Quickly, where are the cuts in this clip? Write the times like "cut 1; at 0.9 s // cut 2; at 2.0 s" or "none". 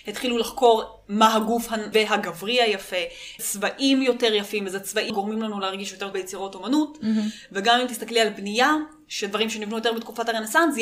cut 1; at 1.9 s // cut 2; at 3.4 s // cut 3; at 5.1 s // cut 4; at 6.1 s

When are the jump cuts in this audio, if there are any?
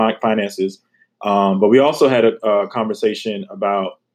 none

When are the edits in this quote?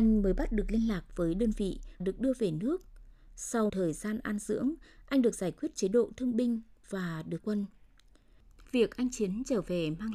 cut 1; at 2.0 s // cut 2; at 3.7 s // cut 3; at 7.4 s

